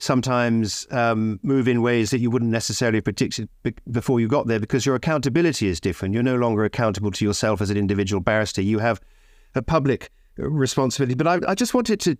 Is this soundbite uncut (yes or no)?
yes